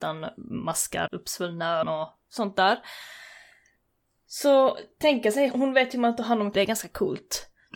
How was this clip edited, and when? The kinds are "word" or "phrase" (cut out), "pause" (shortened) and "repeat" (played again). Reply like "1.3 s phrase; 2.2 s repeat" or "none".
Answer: 1.1 s word; 1.8 s word; 5.5 s word; 6.5 s word